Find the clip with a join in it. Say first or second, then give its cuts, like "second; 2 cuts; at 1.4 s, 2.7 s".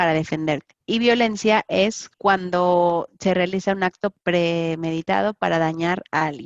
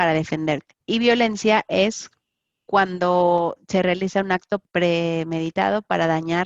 first; 1 cut; at 2.1 s